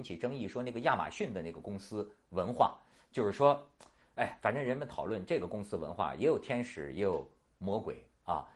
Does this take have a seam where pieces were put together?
no; 0 cuts

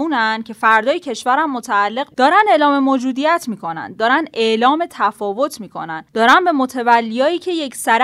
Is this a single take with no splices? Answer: no; 1 cut; at 2.1 s

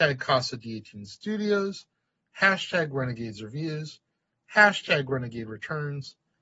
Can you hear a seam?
no; 0 cuts

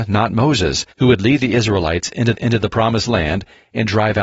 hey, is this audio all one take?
no; 2 cuts; at 0.9 s, 2.3 s

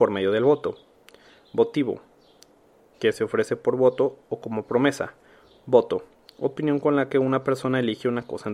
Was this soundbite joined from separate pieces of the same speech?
no; 0 cuts

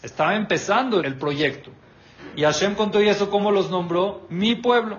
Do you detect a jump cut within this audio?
yes; 1 cut; at 1.0 s

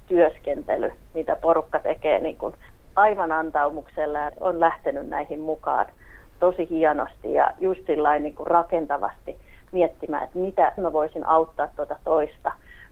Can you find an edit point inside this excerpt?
yes; 1 cut; at 10.8 s

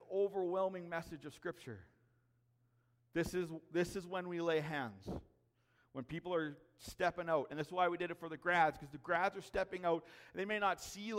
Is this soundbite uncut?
yes; 0 cuts

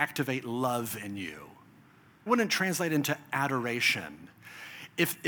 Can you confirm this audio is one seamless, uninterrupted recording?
no; 1 cut; at 2.3 s

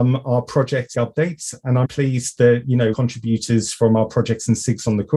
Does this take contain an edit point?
yes; 3 cuts; at 0.9 s, 1.8 s, 2.9 s

